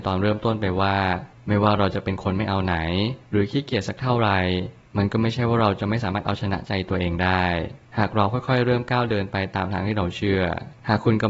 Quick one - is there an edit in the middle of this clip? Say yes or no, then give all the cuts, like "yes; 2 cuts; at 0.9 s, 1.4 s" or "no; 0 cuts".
no; 0 cuts